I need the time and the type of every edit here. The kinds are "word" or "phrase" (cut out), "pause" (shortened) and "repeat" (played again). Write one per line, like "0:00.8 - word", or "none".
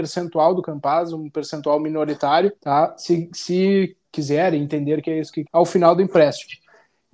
0:02.6 - pause
0:04.0 - word
0:05.5 - phrase